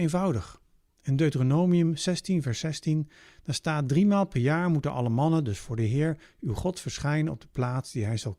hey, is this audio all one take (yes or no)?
yes